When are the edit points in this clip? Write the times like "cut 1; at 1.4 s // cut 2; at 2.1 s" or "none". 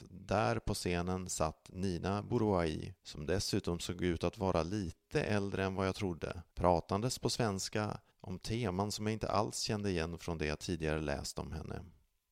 cut 1; at 3.0 s // cut 2; at 6.5 s // cut 3; at 8.1 s